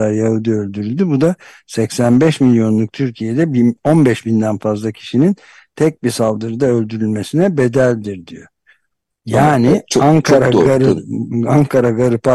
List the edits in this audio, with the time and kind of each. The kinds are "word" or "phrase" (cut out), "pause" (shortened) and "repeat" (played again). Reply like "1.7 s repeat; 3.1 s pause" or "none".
none